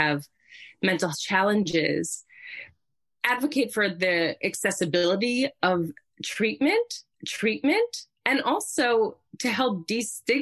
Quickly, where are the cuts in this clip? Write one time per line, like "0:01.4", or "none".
0:01.1
0:07.1